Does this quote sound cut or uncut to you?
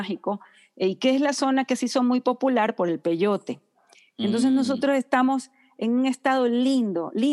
uncut